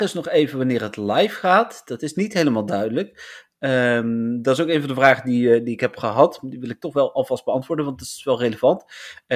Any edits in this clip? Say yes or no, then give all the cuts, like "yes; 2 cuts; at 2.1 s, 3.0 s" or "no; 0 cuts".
no; 0 cuts